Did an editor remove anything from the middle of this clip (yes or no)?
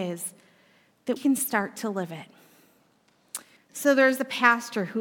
yes